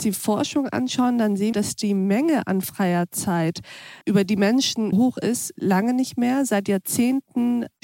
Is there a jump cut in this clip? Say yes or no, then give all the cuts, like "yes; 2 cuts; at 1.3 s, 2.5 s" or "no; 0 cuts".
yes; 4 cuts; at 1.5 s, 4.0 s, 4.9 s, 5.5 s